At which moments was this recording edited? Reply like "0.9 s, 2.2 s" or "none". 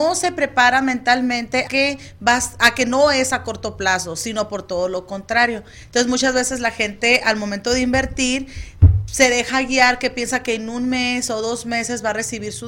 1.7 s

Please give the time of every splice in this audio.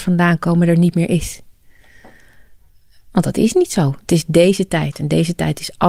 none

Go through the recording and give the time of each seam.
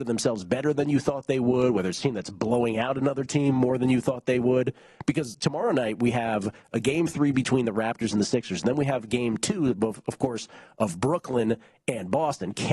none

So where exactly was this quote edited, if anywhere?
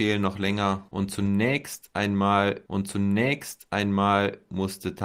2.7 s

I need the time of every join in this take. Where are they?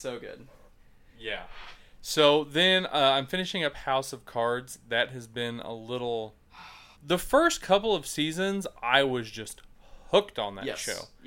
6.9 s

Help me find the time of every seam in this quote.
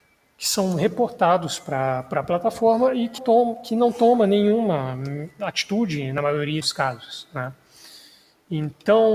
3.2 s, 6.6 s

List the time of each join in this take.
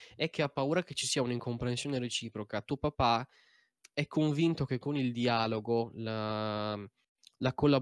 none

